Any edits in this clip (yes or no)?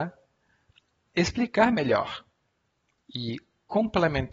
no